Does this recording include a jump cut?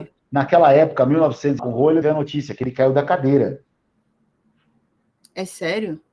yes; 2 cuts; at 1.6 s, 2.0 s

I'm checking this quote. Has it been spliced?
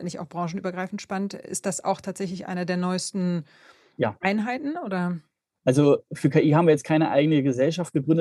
no; 0 cuts

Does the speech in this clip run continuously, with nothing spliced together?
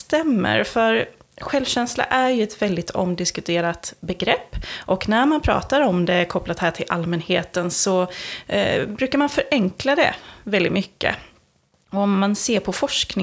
yes; 0 cuts

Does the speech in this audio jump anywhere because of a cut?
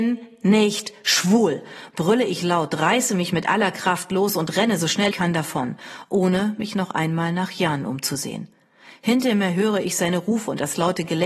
yes; 1 cut; at 5.1 s

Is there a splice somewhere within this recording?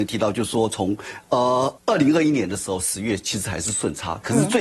yes; 1 cut; at 1.8 s

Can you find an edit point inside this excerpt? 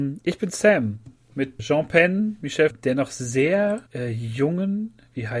yes; 3 cuts; at 1.6 s, 2.7 s, 3.9 s

